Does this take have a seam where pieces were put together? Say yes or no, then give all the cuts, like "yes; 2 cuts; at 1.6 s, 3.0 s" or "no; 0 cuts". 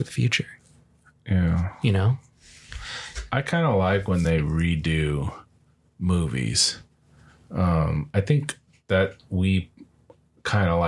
no; 0 cuts